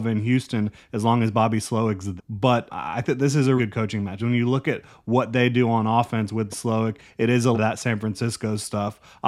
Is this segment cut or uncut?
cut